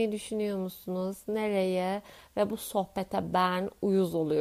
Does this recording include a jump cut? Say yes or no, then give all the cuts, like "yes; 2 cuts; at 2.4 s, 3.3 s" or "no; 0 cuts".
no; 0 cuts